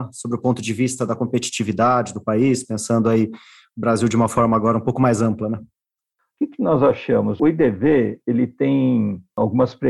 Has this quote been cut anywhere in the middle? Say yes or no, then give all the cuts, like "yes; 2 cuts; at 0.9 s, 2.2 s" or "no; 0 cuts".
no; 0 cuts